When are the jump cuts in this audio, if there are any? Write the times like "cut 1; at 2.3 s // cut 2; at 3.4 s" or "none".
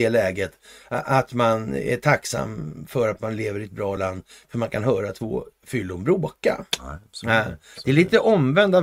none